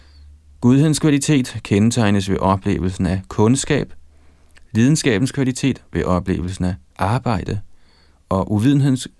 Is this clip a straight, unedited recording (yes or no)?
yes